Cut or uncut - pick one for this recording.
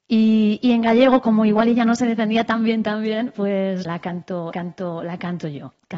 cut